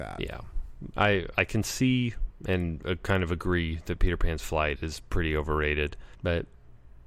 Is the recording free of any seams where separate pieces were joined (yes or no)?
no